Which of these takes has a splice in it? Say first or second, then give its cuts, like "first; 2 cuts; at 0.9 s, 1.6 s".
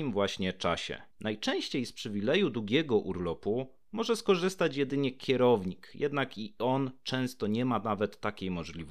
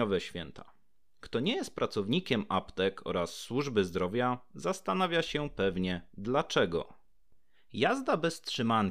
first; 1 cut; at 1.1 s